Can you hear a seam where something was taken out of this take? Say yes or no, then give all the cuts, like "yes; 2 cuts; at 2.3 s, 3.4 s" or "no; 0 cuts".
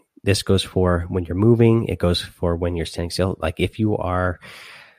no; 0 cuts